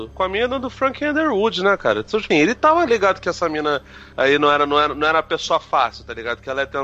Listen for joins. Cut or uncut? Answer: cut